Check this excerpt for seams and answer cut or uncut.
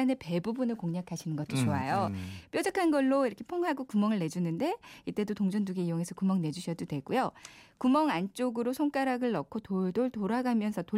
uncut